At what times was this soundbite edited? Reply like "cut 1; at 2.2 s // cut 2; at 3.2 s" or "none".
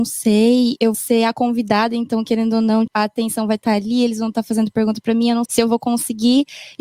cut 1; at 0.9 s // cut 2; at 2.9 s // cut 3; at 5.4 s